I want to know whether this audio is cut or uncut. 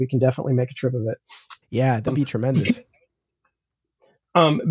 cut